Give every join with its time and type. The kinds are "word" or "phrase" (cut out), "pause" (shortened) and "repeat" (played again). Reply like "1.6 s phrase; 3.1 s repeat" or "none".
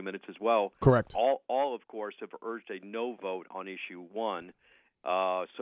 none